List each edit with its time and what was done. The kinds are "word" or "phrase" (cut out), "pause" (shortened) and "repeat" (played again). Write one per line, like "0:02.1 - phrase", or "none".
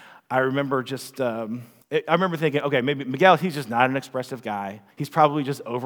0:01.8 - pause
0:04.9 - pause